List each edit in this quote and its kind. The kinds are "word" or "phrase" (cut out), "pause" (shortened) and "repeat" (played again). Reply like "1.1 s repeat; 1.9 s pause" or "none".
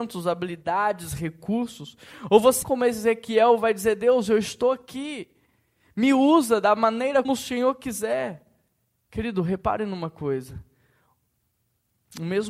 2.6 s word; 7.2 s word